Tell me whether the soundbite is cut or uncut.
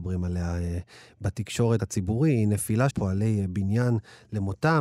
cut